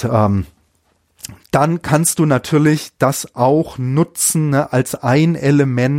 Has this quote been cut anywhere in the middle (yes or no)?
no